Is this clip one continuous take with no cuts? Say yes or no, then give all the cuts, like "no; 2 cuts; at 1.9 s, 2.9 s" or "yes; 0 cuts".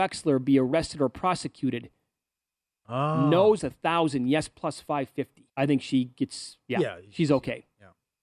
no; 2 cuts; at 3.6 s, 5.5 s